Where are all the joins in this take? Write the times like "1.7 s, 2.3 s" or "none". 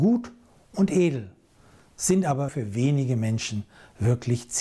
2.5 s

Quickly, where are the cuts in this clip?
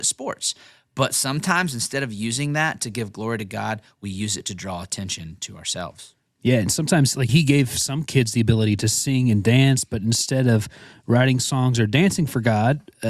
7.3 s

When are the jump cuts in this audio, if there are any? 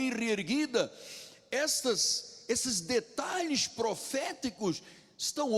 none

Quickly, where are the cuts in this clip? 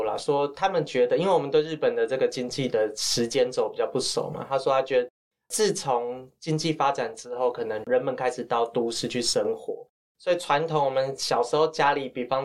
none

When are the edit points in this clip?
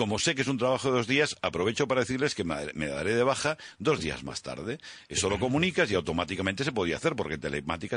none

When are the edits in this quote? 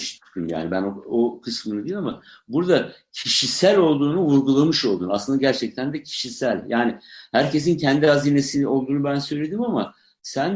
none

